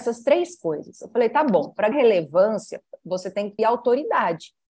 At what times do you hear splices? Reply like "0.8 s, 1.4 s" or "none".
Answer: 1.9 s, 3.6 s